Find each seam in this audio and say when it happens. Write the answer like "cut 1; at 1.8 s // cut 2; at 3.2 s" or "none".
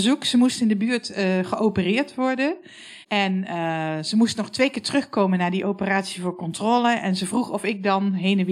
cut 1; at 3.0 s